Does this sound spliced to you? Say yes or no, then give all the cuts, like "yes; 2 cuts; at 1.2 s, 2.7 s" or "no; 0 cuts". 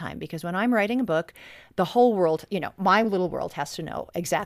no; 0 cuts